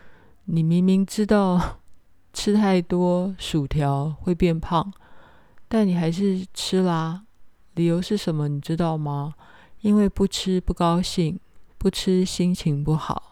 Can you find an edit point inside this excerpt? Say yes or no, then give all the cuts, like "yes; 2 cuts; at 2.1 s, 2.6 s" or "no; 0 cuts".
yes; 1 cut; at 11.7 s